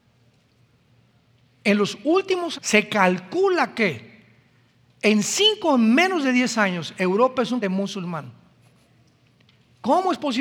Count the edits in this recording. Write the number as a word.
two